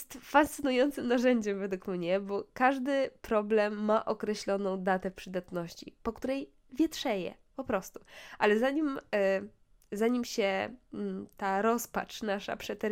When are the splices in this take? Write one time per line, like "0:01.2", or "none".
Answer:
none

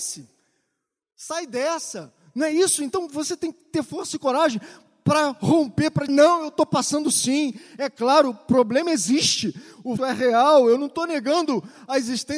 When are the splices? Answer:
0:06.1
0:10.0

